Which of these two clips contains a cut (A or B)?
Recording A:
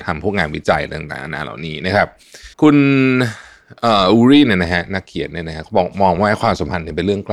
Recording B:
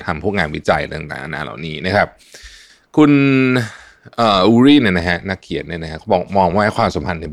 A